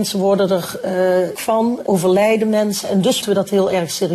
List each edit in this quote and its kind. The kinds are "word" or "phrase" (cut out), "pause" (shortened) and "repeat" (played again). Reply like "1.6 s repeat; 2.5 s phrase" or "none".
1.3 s word; 1.9 s word; 3.2 s word